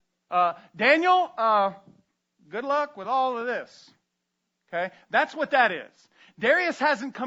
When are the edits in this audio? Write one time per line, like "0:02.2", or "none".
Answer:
none